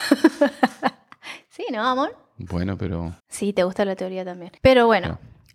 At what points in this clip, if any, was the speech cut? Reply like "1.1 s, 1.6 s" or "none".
3.2 s, 4.6 s